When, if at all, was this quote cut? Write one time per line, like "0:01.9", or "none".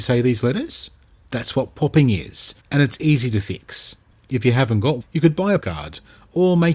0:02.6
0:05.0
0:05.6